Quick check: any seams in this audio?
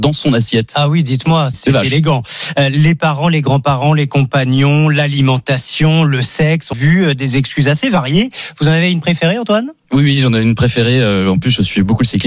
yes; 3 cuts; at 1.5 s, 6.7 s, 9.8 s

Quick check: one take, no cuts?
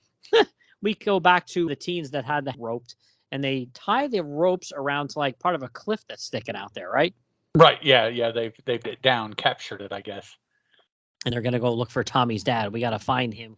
no; 4 cuts; at 1.7 s, 2.5 s, 8.8 s, 11.3 s

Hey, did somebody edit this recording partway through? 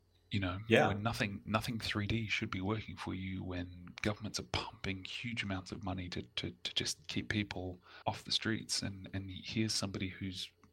yes; 1 cut; at 8.0 s

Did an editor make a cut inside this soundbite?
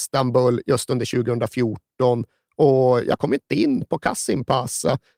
no; 0 cuts

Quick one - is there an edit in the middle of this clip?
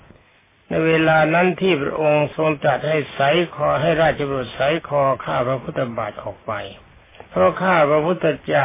yes; 1 cut; at 7.3 s

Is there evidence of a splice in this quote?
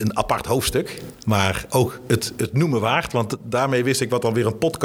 no; 0 cuts

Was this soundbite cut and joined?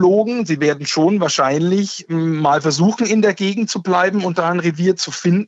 no; 0 cuts

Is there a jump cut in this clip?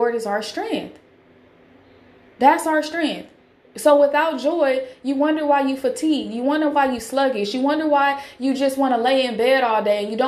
no; 0 cuts

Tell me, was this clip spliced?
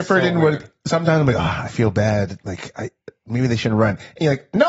no; 0 cuts

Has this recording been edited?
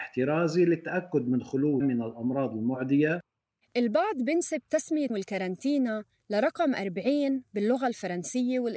yes; 2 cuts; at 1.8 s, 5.1 s

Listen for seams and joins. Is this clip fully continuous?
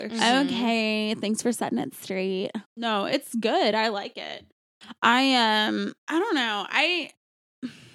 no; 2 cuts; at 2.6 s, 6.0 s

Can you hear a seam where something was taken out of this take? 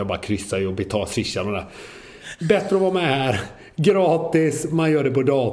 no; 0 cuts

